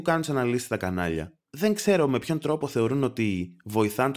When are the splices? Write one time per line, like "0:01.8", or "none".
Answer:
none